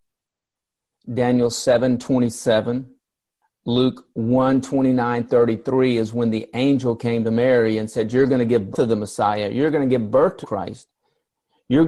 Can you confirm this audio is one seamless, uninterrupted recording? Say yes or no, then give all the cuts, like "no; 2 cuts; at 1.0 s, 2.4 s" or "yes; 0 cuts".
no; 3 cuts; at 5.3 s, 8.7 s, 10.4 s